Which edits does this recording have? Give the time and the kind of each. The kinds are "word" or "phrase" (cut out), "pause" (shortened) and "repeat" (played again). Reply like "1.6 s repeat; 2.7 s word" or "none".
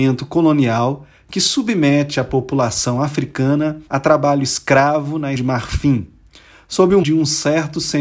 3.9 s pause; 5.4 s word; 7.0 s word